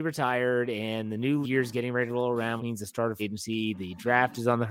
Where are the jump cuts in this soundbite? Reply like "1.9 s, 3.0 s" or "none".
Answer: 1.4 s, 2.6 s, 3.2 s